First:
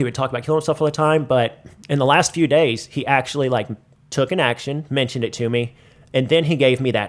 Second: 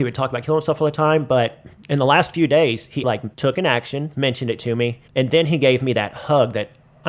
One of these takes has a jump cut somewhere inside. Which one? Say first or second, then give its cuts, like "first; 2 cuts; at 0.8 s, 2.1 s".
second; 3 cuts; at 3.0 s, 3.3 s, 5.1 s